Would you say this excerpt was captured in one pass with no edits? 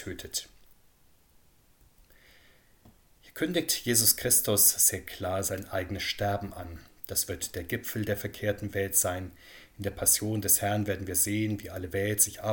yes; 0 cuts

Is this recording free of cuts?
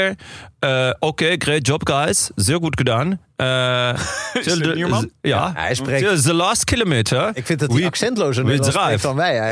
yes; 0 cuts

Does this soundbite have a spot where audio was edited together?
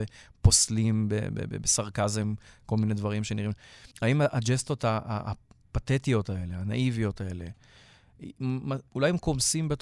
yes; 1 cut; at 3.9 s

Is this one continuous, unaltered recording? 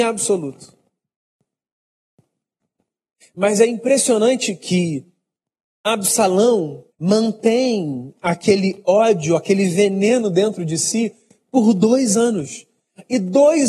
no; 1 cut; at 6.9 s

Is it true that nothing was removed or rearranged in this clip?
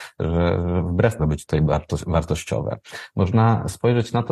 no; 1 cut; at 1.2 s

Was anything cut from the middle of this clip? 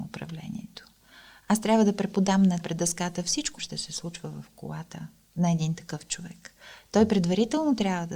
yes; 2 cuts; at 2.6 s, 3.6 s

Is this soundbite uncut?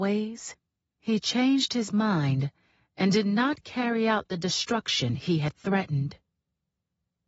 yes; 0 cuts

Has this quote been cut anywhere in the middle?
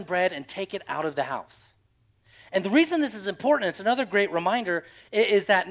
no; 0 cuts

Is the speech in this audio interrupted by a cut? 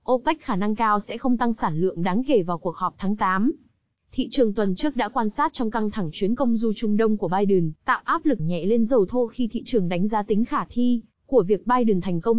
yes; 3 cuts; at 7.8 s, 8.4 s, 8.9 s

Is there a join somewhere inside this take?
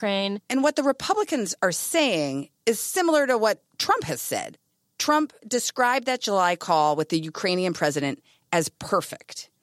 no; 0 cuts

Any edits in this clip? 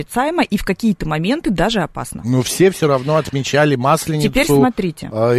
no; 0 cuts

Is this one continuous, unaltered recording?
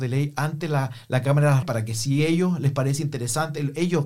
no; 1 cut; at 1.6 s

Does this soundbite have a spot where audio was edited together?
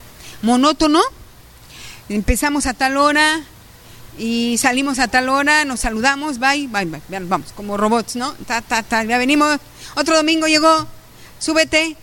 no; 0 cuts

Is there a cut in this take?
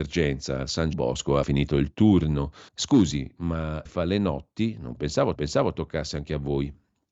yes; 5 cuts; at 0.9 s, 1.4 s, 2.7 s, 3.9 s, 5.4 s

